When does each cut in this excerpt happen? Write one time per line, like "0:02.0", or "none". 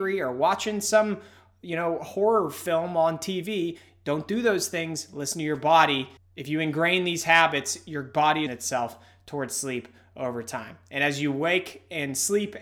0:06.2
0:08.5